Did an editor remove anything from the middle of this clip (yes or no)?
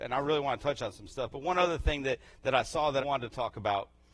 yes